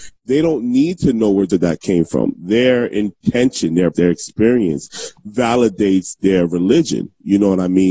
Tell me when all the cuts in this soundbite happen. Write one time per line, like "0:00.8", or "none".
0:01.5
0:03.9